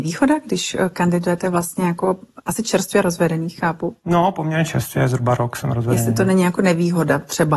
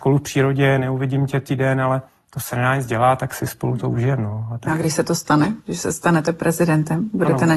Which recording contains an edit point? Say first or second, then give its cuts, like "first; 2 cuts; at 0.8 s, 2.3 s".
second; 1 cut; at 2.1 s